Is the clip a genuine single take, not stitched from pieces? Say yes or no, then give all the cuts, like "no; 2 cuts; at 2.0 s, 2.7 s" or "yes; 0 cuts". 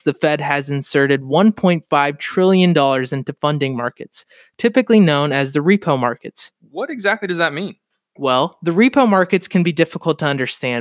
yes; 0 cuts